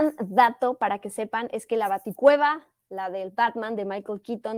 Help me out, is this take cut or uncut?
uncut